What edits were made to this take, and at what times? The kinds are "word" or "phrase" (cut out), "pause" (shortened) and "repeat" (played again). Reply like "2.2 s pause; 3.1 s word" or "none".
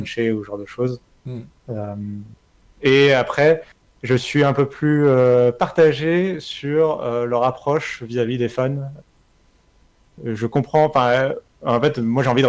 none